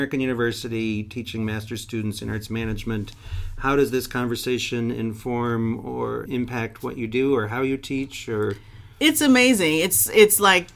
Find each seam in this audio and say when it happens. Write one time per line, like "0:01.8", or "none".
0:06.3